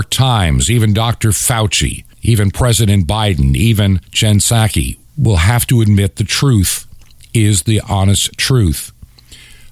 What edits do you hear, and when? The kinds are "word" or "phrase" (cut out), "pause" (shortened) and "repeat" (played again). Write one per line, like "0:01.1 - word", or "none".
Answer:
0:02.1 - pause
0:04.0 - pause
0:05.1 - pause